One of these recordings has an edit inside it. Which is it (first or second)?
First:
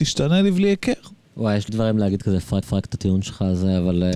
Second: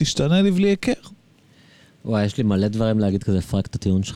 first